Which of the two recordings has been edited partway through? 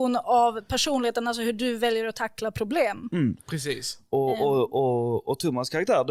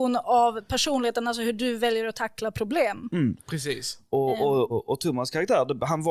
second; 1 cut; at 4.7 s

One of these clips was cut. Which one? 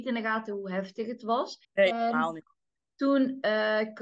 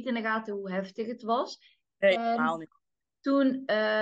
first; 1 cut; at 1.6 s

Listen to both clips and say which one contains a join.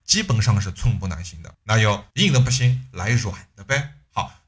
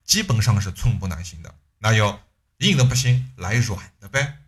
first; 2 cuts; at 1.5 s, 2.1 s

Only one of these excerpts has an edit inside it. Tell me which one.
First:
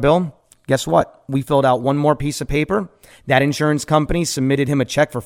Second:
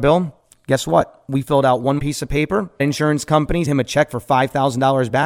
second; 3 cuts; at 2.0 s, 2.8 s, 3.6 s

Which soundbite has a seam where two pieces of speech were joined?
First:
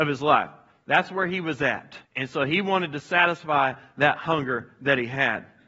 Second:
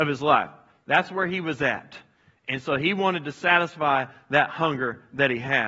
first; 1 cut; at 2.0 s

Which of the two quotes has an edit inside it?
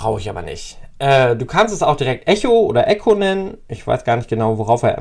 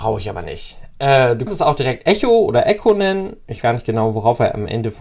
second; 2 cuts; at 1.5 s, 3.6 s

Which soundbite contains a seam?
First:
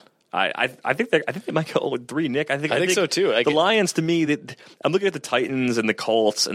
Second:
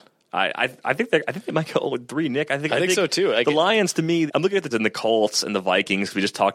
second; 2 cuts; at 4.3 s, 4.7 s

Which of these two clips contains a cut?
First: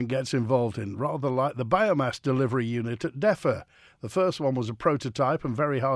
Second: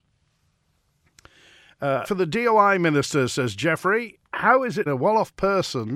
second; 3 cuts; at 2.0 s, 4.2 s, 4.9 s

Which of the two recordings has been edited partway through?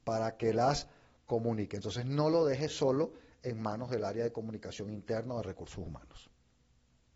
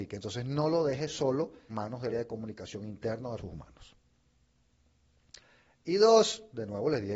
second; 3 cuts; at 1.7 s, 2.1 s, 3.4 s

